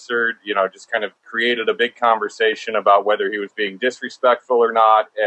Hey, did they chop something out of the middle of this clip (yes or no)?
yes